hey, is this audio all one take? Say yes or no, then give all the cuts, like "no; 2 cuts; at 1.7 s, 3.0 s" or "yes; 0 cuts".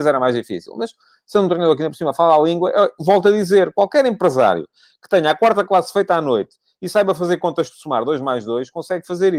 yes; 0 cuts